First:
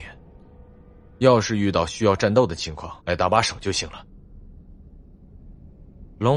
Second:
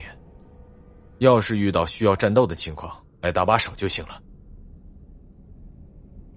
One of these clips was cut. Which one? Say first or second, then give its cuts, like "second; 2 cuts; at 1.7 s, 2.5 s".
first; 1 cut; at 3.0 s